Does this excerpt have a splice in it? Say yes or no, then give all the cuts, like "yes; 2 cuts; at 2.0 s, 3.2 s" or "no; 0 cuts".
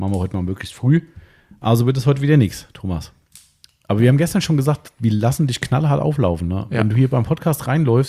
no; 0 cuts